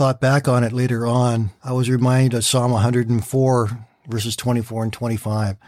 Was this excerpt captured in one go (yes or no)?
yes